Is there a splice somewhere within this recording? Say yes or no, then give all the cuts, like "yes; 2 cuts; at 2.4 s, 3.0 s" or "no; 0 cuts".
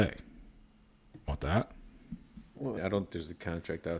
yes; 3 cuts; at 1.3 s, 2.8 s, 3.1 s